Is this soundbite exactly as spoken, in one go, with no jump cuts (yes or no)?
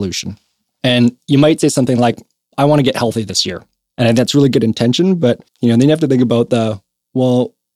no